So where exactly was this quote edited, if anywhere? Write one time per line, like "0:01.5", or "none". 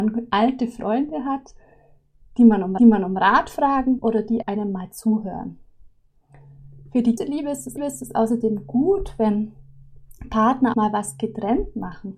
0:02.8
0:04.0
0:04.4
0:07.2
0:07.8
0:10.7